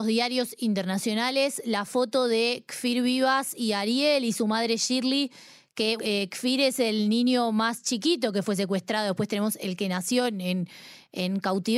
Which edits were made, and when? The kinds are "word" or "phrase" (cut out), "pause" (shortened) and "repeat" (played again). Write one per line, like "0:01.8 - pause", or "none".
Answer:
0:06.0 - word